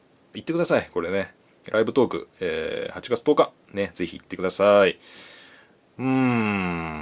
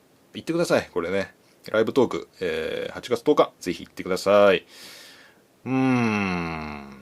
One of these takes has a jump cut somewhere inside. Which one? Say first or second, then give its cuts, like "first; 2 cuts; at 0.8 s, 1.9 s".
second; 1 cut; at 3.6 s